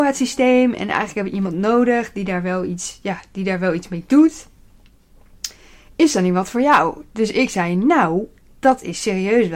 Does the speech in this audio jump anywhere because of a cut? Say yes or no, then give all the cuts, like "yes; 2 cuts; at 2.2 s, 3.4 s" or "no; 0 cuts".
no; 0 cuts